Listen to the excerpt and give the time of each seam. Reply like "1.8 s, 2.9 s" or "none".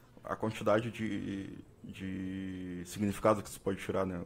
1.7 s